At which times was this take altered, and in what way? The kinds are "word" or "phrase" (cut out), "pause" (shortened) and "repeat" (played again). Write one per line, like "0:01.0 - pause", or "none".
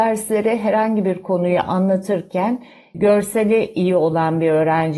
none